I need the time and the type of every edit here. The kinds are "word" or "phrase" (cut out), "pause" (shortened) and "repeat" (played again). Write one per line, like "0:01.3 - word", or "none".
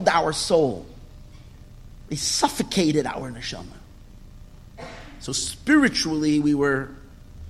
none